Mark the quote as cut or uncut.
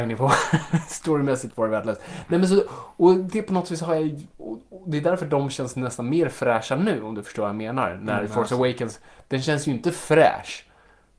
uncut